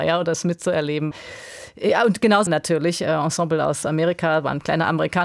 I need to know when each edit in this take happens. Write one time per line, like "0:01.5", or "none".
0:02.5